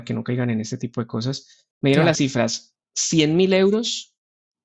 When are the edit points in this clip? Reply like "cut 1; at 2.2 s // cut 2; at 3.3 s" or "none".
cut 1; at 1.7 s // cut 2; at 2.1 s // cut 3; at 2.8 s